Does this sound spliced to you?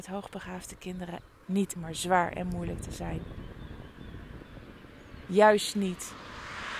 yes; 2 cuts; at 1.4 s, 1.8 s

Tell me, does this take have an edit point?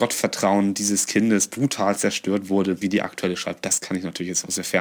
no; 0 cuts

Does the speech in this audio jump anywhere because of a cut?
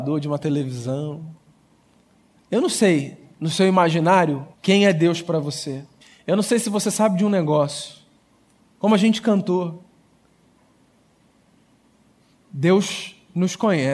yes; 2 cuts; at 4.5 s, 6.0 s

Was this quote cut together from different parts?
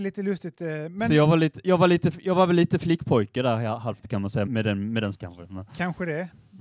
yes; 2 cuts; at 4.5 s, 5.1 s

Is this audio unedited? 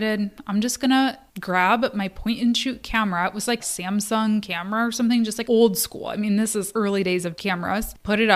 no; 4 cuts; at 3.6 s, 5.4 s, 6.7 s, 7.4 s

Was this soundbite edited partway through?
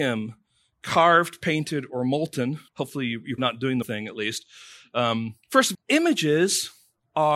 yes; 5 cuts; at 2.7 s, 3.4 s, 3.8 s, 5.4 s, 5.7 s

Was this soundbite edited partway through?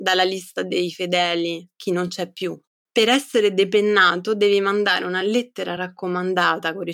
no; 0 cuts

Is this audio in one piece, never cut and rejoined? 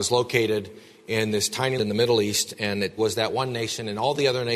no; 2 cuts; at 1.8 s, 3.0 s

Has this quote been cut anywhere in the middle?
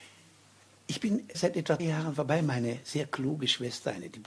yes; 2 cuts; at 1.3 s, 1.8 s

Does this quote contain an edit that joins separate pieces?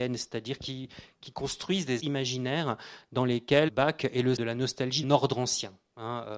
yes; 4 cuts; at 2.0 s, 3.7 s, 4.4 s, 5.0 s

